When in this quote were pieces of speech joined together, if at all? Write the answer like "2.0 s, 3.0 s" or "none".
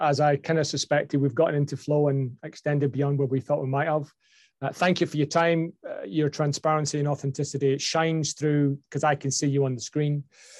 none